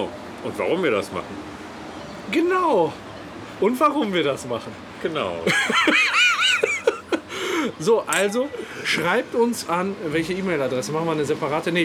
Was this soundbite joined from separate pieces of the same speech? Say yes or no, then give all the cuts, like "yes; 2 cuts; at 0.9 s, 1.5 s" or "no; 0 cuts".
no; 0 cuts